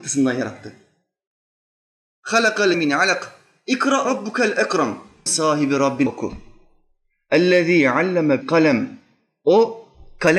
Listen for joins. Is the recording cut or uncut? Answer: cut